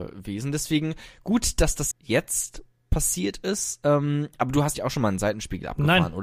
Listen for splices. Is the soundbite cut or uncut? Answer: cut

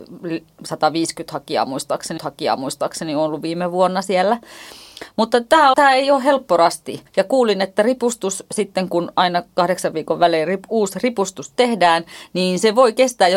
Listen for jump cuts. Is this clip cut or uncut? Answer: cut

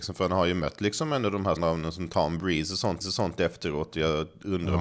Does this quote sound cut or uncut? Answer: cut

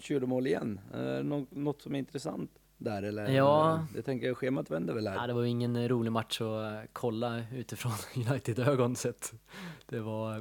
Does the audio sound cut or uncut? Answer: cut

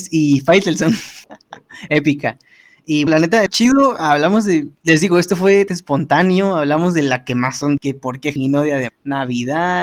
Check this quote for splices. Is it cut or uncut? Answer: cut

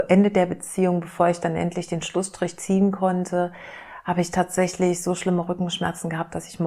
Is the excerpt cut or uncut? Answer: uncut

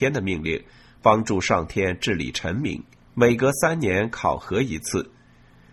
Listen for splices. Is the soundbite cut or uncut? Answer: cut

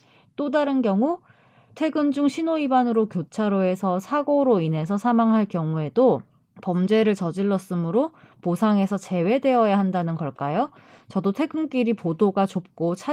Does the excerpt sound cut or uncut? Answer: uncut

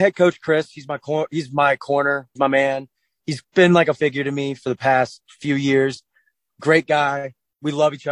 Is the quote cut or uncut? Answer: cut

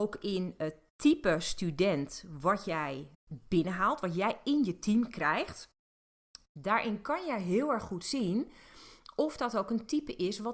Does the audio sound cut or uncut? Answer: cut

